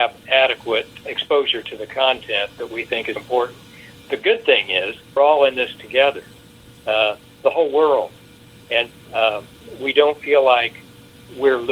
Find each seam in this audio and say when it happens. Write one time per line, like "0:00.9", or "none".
0:01.0
0:03.2
0:05.2
0:08.9